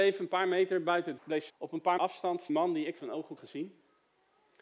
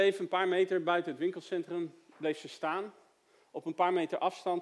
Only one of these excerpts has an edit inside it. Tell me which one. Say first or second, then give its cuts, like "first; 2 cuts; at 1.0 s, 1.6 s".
first; 6 cuts; at 1.2 s, 1.5 s, 2.0 s, 2.5 s, 3.0 s, 3.4 s